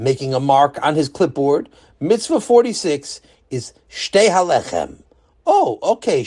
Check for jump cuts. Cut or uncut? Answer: uncut